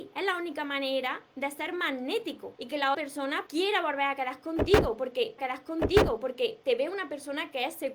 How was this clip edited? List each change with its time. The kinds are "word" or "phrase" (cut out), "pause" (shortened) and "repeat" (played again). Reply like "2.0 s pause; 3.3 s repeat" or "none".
2.5 s pause; 2.9 s word; 3.5 s word; 5.4 s repeat